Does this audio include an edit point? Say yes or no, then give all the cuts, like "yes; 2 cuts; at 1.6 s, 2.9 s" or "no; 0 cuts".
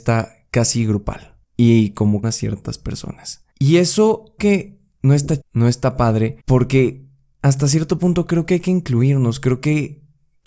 yes; 5 cuts; at 2.2 s, 3.5 s, 4.4 s, 5.4 s, 6.4 s